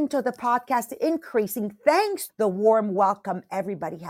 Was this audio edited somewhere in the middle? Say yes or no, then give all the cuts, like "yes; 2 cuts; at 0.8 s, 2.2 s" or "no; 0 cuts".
yes; 2 cuts; at 1.0 s, 2.3 s